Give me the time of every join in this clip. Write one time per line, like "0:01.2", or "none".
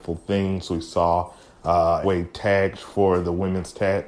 0:02.0
0:02.7